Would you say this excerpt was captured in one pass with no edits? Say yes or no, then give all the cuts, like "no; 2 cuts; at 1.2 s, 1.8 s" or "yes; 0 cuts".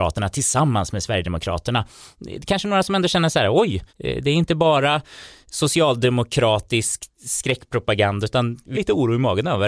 no; 2 cuts; at 3.9 s, 8.7 s